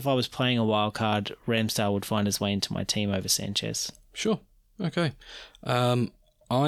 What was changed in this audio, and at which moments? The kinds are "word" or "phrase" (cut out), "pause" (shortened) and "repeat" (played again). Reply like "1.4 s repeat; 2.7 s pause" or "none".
4.6 s pause